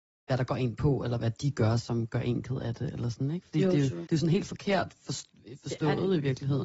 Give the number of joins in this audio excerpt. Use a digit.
1